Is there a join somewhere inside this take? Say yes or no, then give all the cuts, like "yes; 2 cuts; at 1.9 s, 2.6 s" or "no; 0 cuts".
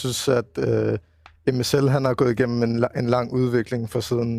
no; 0 cuts